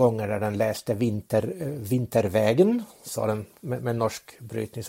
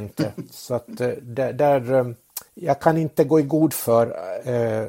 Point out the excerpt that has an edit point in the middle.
second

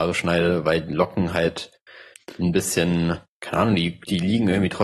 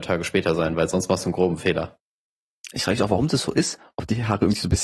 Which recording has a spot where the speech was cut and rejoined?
first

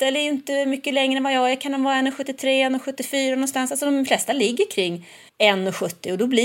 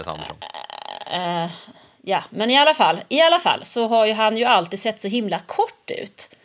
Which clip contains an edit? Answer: first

